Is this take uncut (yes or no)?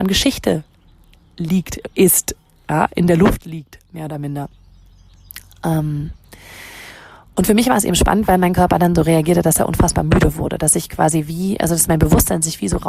yes